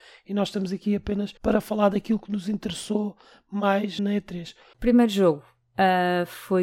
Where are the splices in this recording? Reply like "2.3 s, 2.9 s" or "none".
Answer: 1.4 s, 4.0 s